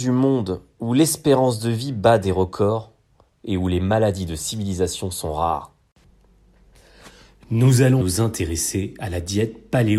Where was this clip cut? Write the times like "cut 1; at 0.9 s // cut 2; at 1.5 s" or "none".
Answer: cut 1; at 8.0 s